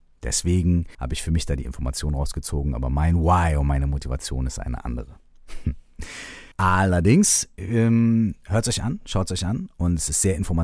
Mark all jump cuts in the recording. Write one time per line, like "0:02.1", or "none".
0:00.9
0:06.5